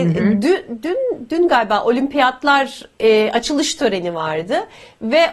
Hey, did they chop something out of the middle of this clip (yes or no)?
no